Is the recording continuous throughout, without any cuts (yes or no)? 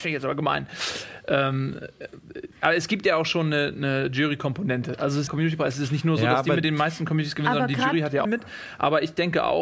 no